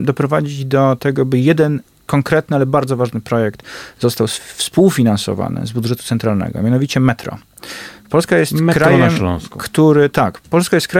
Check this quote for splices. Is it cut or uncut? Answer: uncut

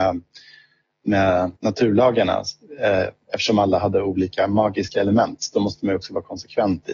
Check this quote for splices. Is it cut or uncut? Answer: cut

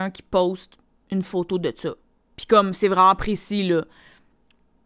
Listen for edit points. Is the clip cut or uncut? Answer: uncut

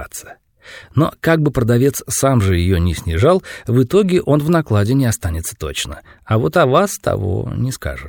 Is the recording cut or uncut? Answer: uncut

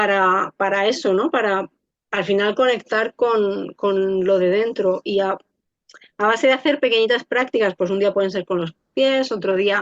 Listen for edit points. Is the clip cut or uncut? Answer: uncut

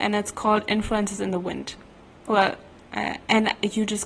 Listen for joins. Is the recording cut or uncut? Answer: uncut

